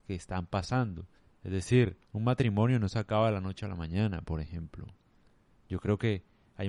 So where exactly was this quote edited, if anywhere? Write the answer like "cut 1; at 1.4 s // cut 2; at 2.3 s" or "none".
cut 1; at 1.2 s // cut 2; at 2.0 s